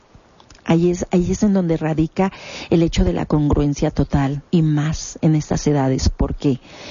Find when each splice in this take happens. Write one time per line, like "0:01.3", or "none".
0:04.5